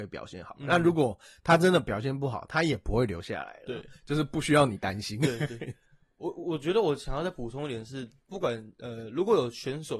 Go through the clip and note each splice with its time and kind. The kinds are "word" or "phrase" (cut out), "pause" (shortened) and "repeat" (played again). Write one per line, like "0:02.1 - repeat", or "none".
none